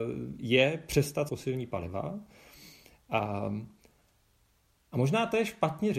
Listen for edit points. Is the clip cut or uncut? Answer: cut